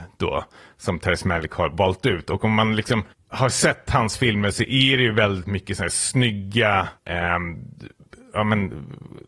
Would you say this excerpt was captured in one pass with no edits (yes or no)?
no